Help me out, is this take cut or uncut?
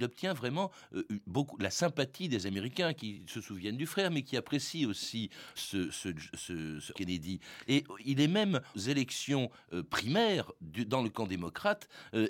cut